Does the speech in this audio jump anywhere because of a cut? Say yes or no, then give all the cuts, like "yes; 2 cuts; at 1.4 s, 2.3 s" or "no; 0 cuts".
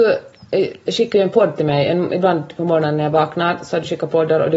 no; 0 cuts